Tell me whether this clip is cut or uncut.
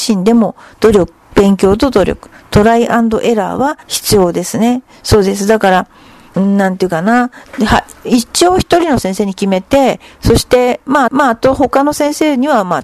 cut